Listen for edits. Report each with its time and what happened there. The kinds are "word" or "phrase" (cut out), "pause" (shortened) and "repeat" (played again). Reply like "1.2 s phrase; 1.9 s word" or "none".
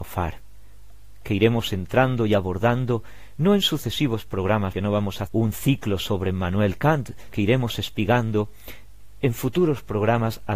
4.7 s word; 5.3 s word; 7.3 s word